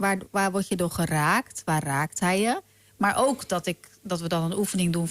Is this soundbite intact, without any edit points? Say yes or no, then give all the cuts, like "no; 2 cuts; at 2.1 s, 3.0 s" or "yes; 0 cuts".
yes; 0 cuts